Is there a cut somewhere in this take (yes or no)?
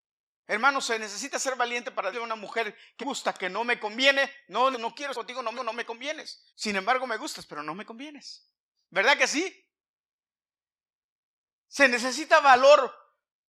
yes